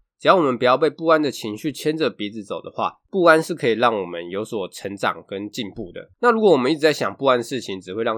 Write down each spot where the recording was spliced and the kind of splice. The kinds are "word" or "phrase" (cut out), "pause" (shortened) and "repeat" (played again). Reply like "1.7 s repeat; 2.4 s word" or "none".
6.1 s pause